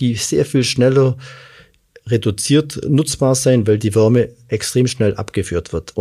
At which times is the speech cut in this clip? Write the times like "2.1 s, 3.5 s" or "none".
none